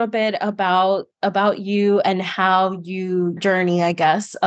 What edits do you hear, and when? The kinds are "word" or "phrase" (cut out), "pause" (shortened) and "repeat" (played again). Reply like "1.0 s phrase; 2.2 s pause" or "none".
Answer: 3.4 s word